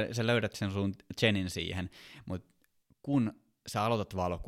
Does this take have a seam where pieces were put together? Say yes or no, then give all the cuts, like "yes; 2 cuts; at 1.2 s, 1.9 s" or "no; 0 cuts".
yes; 1 cut; at 2.8 s